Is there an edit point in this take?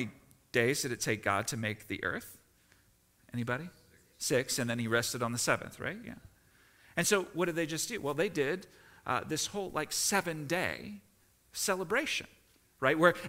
no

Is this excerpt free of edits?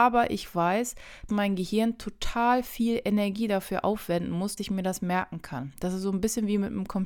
no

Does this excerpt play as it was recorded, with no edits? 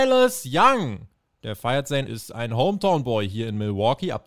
no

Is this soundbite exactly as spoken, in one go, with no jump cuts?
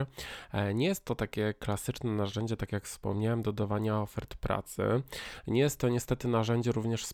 yes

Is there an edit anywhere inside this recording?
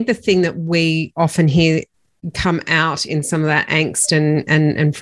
yes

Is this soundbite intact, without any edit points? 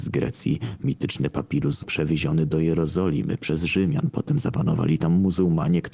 no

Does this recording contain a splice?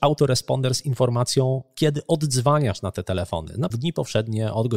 yes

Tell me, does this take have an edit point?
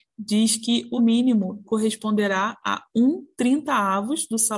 yes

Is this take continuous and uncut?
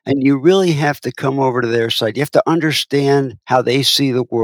yes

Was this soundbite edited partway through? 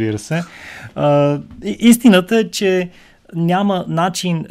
no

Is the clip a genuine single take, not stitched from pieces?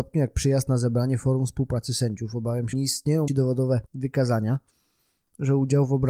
no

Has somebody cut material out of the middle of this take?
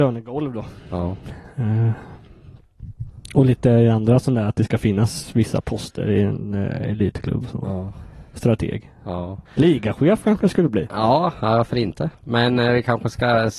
yes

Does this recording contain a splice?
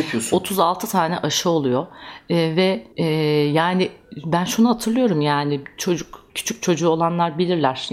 yes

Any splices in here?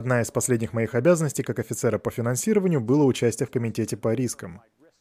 no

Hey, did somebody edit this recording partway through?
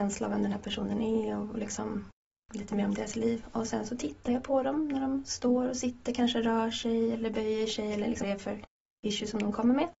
yes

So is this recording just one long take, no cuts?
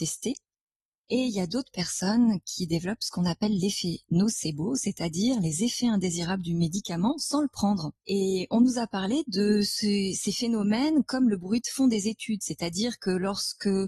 no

